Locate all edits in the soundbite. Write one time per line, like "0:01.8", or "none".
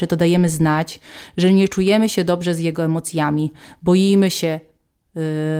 none